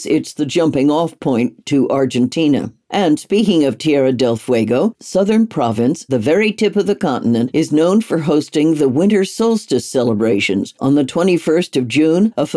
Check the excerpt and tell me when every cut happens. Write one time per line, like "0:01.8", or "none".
0:06.1